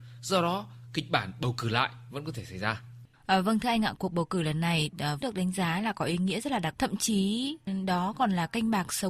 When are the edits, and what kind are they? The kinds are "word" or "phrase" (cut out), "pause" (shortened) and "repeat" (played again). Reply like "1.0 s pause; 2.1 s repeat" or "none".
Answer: 3.1 s pause; 5.2 s word; 6.7 s word